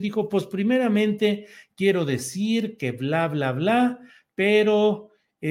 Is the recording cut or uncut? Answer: uncut